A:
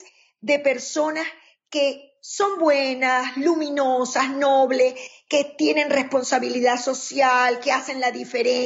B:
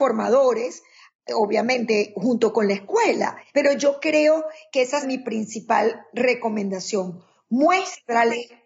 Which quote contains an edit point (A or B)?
B